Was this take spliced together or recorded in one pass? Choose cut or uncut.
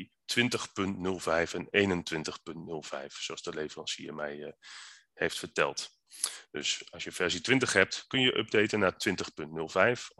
uncut